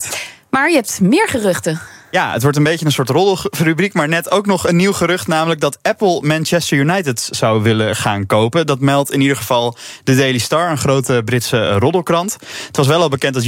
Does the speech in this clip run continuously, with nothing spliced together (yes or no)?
yes